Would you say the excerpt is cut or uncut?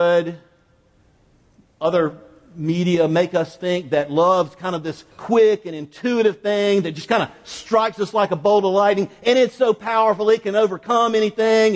cut